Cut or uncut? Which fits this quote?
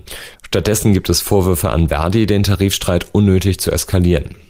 uncut